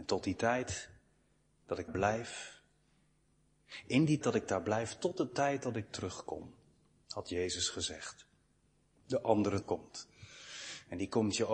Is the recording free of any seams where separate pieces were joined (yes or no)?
no